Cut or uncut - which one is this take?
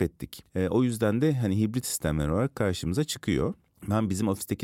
cut